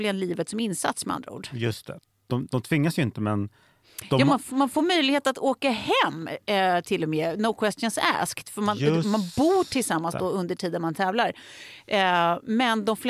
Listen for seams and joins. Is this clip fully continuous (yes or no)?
yes